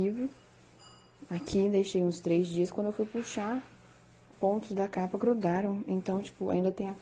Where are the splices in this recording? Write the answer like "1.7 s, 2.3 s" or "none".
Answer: 4.3 s